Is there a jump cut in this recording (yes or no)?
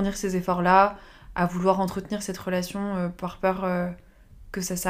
no